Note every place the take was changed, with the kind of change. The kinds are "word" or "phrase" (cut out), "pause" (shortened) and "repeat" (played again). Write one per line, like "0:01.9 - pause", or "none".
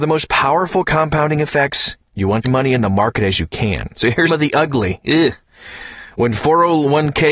0:02.1 - pause
0:02.4 - phrase
0:03.9 - pause
0:04.3 - word